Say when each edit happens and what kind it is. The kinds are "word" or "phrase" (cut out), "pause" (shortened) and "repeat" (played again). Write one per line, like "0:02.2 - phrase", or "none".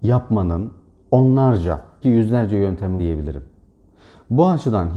0:02.0 - word
0:03.0 - word